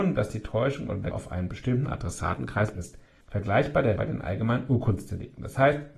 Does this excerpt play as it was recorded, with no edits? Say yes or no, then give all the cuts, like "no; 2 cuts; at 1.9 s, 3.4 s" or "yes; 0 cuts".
no; 3 cuts; at 1.1 s, 2.7 s, 4.0 s